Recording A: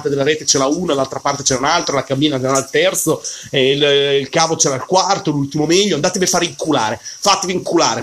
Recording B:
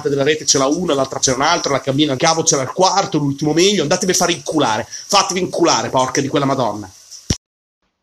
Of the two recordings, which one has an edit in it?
B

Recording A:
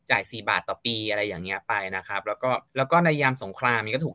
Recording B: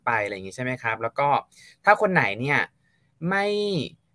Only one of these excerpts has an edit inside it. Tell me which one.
A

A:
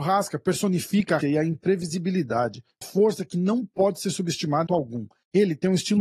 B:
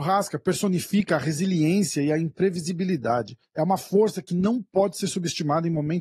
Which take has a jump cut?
A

